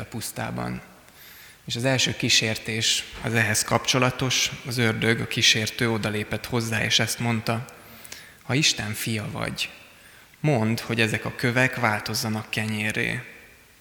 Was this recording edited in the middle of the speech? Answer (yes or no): no